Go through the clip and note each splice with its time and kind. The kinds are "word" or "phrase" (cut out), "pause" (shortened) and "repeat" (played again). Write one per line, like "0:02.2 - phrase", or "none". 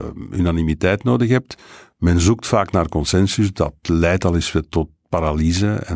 none